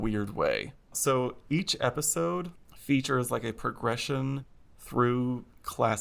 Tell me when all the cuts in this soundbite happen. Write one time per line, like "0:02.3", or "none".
none

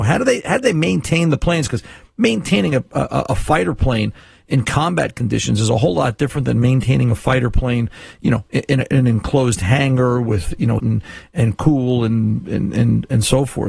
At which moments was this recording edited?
0:10.8

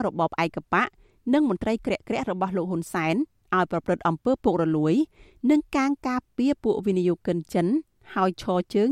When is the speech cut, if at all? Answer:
none

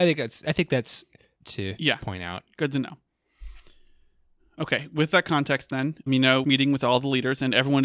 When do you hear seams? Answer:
0:01.3
0:06.1
0:06.4

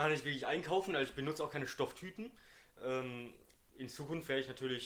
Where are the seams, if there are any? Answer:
none

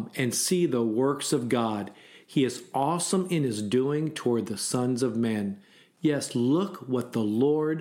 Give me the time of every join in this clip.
none

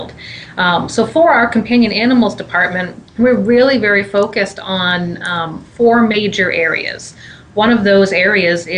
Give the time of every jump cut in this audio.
0:03.1

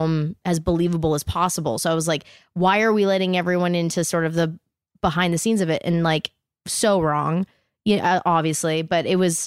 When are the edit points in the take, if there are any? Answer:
none

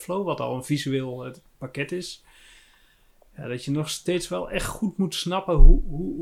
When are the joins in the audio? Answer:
none

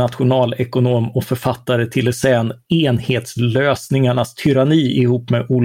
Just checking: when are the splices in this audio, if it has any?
none

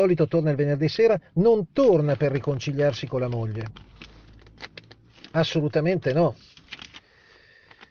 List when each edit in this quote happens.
none

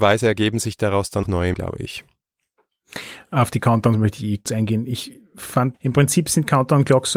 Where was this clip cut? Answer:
0:01.2
0:01.5
0:04.5
0:05.7

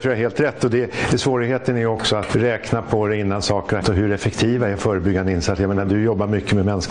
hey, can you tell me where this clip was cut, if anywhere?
0:02.3
0:03.8

